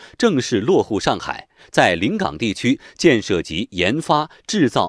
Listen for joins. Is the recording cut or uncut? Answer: uncut